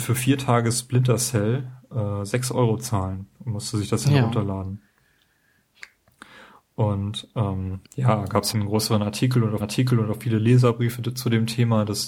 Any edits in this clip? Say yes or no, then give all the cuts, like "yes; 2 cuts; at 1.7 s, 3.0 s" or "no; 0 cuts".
yes; 3 cuts; at 7.8 s, 8.5 s, 9.6 s